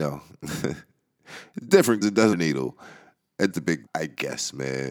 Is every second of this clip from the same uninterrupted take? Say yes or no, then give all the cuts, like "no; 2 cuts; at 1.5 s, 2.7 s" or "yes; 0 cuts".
no; 4 cuts; at 2.0 s, 2.3 s, 3.5 s, 3.9 s